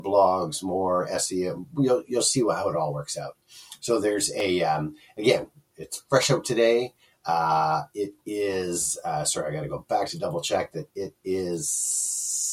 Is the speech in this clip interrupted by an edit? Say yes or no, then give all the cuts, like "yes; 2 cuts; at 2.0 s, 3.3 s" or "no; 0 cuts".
no; 0 cuts